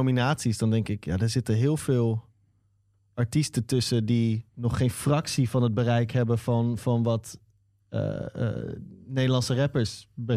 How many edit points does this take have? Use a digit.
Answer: 1